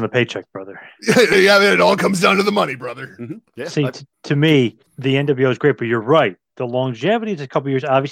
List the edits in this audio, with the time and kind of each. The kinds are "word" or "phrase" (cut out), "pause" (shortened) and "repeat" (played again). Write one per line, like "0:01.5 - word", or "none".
0:03.5 - pause
0:04.1 - pause
0:04.9 - pause